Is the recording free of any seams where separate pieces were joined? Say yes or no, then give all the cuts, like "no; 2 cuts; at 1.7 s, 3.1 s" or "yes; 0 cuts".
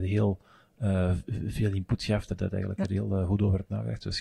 yes; 0 cuts